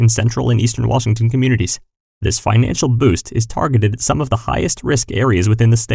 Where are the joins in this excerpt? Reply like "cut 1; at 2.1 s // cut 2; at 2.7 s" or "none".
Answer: none